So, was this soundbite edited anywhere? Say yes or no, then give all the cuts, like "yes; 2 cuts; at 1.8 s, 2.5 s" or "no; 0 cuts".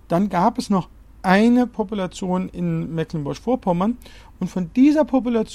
no; 0 cuts